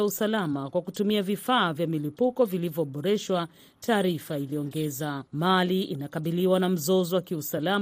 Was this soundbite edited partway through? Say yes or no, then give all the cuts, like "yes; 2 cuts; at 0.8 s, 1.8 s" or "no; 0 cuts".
yes; 1 cut; at 5.3 s